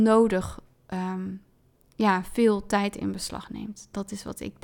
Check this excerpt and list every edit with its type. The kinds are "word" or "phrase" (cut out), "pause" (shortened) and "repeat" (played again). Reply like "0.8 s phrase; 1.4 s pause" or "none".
none